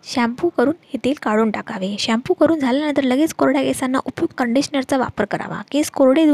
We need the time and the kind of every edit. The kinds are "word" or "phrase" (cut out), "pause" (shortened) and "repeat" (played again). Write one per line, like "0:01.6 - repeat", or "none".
0:04.3 - word